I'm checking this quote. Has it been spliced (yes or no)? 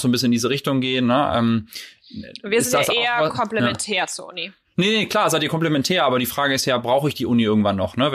no